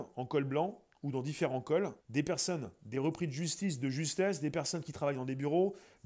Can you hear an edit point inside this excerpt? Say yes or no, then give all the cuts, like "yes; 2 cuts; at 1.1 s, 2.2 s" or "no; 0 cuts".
yes; 1 cut; at 2.0 s